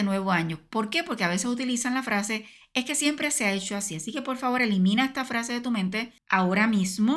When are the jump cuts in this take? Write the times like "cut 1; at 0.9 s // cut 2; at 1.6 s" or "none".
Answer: none